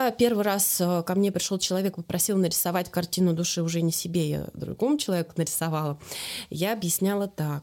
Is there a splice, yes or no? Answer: no